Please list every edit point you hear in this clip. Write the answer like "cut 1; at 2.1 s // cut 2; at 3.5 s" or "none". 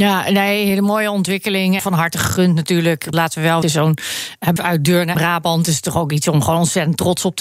cut 1; at 1.8 s // cut 2; at 3.1 s // cut 3; at 3.6 s // cut 4; at 4.6 s // cut 5; at 5.2 s